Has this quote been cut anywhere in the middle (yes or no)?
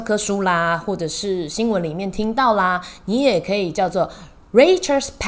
no